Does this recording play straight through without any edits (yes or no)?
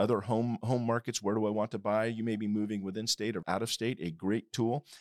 no